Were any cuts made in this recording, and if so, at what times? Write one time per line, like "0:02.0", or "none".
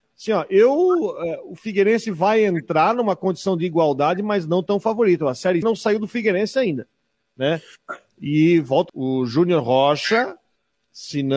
0:05.6
0:08.9